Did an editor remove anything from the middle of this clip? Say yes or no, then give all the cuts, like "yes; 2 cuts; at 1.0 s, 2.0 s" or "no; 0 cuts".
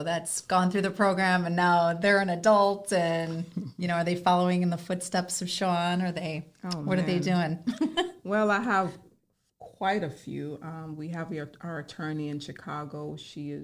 no; 0 cuts